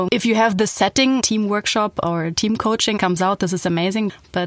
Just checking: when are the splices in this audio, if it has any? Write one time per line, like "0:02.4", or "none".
0:01.2
0:03.0